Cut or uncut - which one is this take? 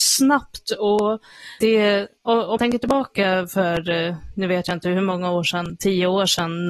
cut